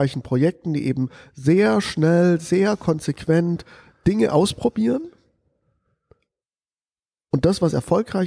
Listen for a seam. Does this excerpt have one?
no; 0 cuts

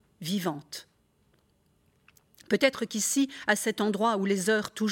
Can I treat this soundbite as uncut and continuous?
yes; 0 cuts

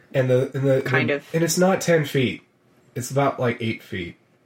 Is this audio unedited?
yes; 0 cuts

